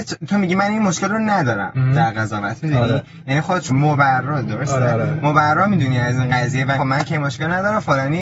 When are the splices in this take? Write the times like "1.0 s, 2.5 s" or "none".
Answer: 3.7 s, 6.8 s